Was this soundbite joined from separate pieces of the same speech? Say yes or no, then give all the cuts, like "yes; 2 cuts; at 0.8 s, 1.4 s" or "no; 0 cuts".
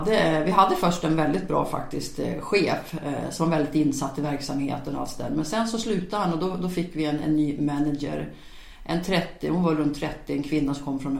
no; 0 cuts